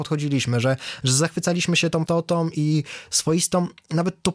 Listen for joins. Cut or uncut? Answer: cut